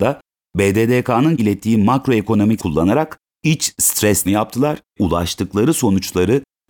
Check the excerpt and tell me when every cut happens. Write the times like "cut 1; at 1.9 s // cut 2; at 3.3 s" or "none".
cut 1; at 1.4 s // cut 2; at 2.6 s // cut 3; at 3.4 s // cut 4; at 4.3 s // cut 5; at 5.0 s